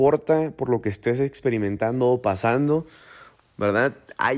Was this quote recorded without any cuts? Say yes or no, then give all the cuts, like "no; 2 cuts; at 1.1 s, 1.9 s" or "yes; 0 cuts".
yes; 0 cuts